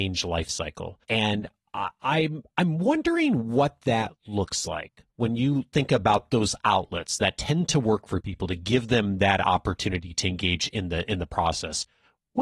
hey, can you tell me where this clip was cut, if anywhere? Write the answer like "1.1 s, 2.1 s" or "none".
1.0 s